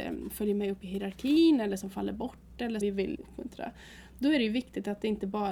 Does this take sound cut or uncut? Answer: cut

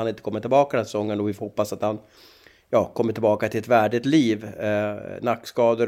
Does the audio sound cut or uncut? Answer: uncut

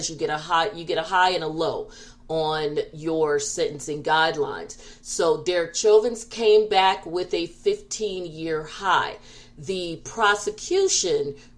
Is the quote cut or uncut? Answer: uncut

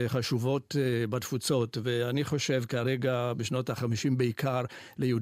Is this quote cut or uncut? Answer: uncut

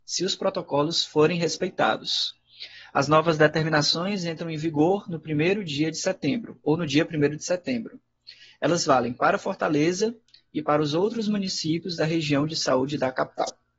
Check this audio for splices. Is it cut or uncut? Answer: uncut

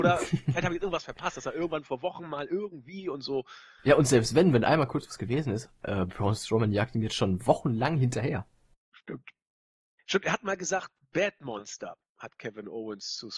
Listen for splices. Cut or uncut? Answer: uncut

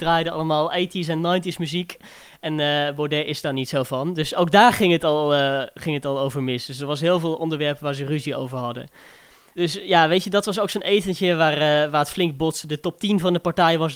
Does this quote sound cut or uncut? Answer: uncut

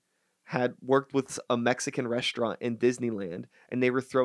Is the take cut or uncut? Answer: uncut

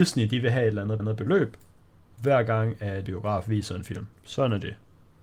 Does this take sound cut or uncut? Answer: cut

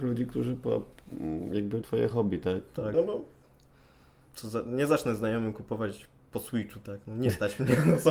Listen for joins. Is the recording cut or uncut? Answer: cut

